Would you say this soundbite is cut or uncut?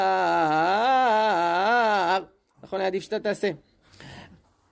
uncut